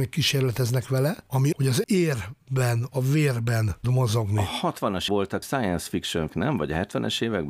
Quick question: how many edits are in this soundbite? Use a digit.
6